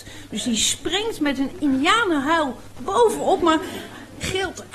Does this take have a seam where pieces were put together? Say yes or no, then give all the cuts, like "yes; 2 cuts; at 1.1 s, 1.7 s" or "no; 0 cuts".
no; 0 cuts